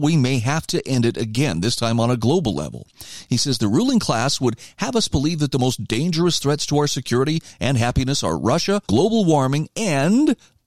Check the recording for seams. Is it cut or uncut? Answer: cut